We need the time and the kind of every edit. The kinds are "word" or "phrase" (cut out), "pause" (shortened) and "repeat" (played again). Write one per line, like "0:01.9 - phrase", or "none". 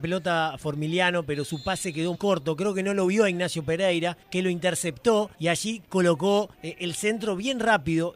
0:02.1 - word
0:04.2 - pause
0:05.3 - pause
0:06.5 - pause